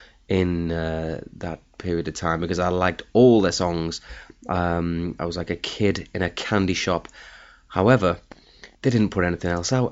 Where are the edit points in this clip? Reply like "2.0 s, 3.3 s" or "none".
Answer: 8.7 s